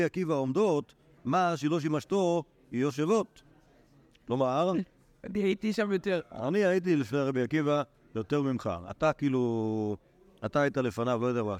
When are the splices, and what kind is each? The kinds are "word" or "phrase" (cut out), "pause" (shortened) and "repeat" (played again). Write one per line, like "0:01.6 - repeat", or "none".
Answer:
none